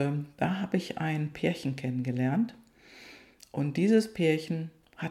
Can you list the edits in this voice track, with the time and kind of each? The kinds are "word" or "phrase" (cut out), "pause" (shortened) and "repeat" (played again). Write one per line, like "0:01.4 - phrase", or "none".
none